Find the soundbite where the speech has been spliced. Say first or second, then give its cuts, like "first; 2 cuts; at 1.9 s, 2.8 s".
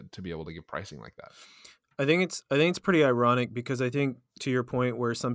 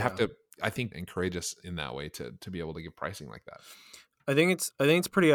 second; 1 cut; at 0.9 s